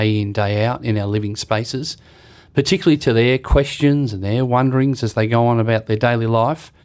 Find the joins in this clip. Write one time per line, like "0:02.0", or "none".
none